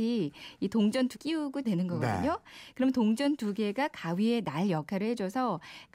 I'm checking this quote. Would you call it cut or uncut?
cut